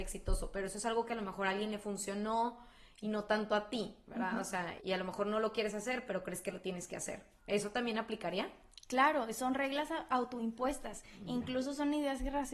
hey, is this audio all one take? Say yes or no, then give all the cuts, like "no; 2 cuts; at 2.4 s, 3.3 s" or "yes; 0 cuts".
no; 1 cut; at 4.8 s